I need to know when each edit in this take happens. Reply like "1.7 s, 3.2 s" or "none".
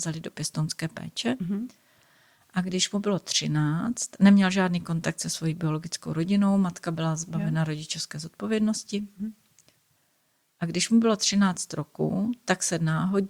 none